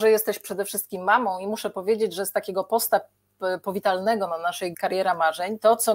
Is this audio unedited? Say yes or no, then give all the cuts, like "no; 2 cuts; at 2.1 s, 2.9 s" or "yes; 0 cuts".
no; 1 cut; at 4.7 s